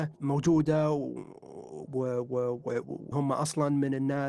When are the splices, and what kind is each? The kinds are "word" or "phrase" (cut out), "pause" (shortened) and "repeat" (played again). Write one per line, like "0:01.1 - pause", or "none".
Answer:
0:03.1 - word